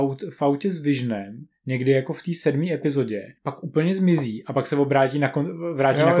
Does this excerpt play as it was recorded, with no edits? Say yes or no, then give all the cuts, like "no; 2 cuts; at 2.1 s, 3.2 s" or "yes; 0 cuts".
no; 1 cut; at 3.4 s